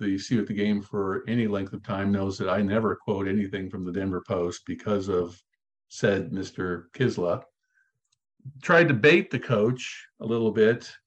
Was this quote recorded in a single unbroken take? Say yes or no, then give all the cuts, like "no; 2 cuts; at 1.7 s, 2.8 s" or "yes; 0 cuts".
yes; 0 cuts